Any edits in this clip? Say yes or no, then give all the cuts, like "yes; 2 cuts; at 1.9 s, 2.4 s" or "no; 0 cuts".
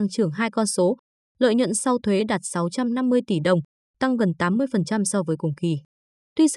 no; 0 cuts